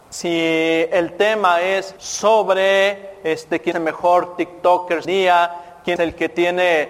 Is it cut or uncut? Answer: cut